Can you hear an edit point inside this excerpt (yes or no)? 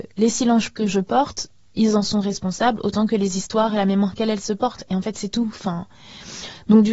no